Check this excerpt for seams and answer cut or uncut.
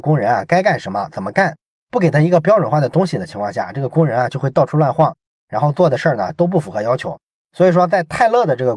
uncut